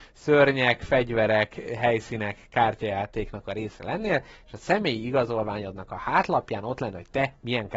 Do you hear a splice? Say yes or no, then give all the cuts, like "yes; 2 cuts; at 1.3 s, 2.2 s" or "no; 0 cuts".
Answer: no; 0 cuts